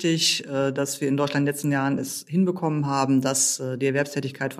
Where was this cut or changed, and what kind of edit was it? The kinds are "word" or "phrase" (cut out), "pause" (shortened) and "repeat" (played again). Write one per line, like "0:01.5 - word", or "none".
none